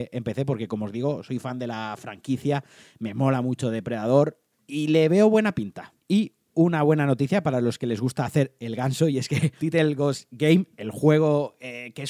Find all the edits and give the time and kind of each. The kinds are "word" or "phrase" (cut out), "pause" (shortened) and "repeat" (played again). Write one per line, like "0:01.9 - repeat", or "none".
0:09.6 - word